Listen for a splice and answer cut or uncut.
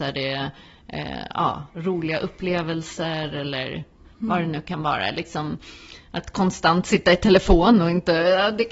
uncut